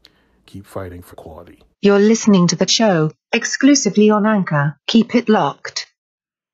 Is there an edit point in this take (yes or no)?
yes